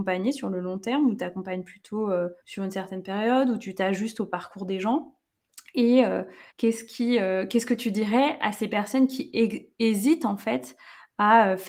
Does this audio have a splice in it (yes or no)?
yes